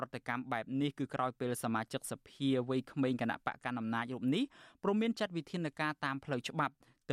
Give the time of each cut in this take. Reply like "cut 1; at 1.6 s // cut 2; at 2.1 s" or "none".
none